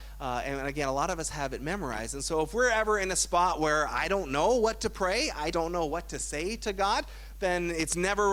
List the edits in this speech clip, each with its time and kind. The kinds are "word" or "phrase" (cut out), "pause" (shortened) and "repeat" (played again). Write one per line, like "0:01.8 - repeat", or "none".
0:05.5 - word